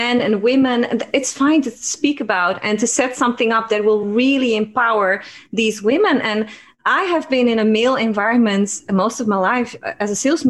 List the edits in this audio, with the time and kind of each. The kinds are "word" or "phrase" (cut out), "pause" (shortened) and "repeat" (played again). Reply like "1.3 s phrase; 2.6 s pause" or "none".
none